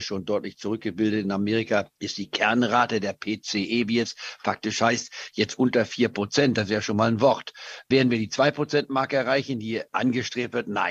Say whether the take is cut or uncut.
uncut